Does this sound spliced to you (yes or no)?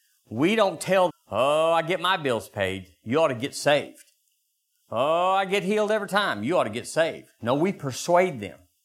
yes